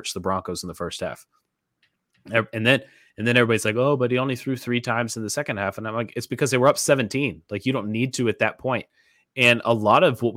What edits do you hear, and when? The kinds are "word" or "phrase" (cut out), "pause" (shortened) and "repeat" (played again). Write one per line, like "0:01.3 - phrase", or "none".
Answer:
none